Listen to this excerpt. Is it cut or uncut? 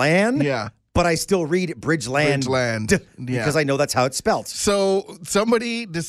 uncut